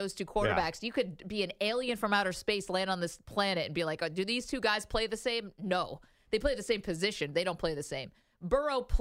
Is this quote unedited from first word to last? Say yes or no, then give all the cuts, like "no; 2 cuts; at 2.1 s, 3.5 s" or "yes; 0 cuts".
yes; 0 cuts